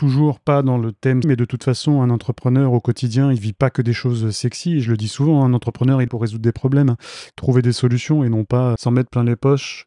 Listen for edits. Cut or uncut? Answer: cut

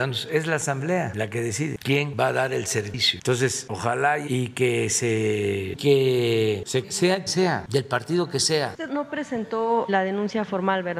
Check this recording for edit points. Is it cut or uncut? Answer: cut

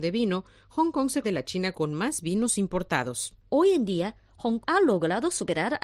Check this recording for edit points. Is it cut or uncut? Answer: cut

